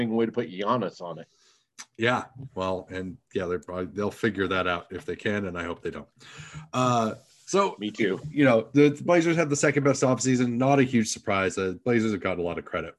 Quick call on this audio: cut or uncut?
uncut